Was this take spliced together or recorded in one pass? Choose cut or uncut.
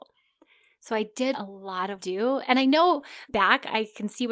cut